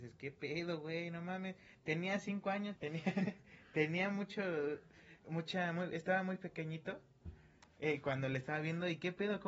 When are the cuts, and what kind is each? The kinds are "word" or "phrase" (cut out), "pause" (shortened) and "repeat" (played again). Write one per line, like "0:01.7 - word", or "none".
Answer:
0:02.8 - word
0:05.2 - pause
0:07.7 - pause